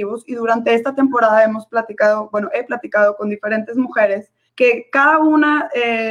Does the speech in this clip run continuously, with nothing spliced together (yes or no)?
no